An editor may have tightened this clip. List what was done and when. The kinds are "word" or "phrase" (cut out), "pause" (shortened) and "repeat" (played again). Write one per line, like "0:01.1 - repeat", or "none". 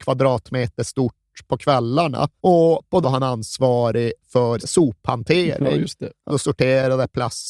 0:02.4 - pause
0:03.0 - word
0:04.6 - word
0:06.3 - word